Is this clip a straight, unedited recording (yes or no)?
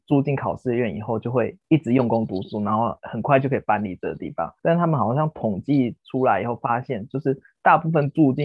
no